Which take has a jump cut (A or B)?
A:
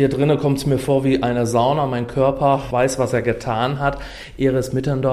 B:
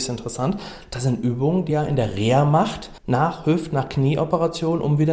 B